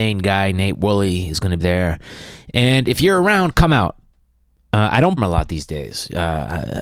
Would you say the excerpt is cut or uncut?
cut